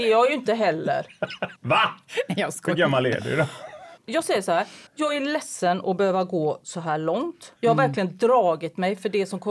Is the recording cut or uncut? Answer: cut